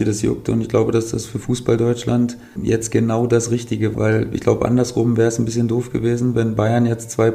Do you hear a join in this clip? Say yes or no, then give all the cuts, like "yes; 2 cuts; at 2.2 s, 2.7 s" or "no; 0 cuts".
yes; 2 cuts; at 2.6 s, 3.9 s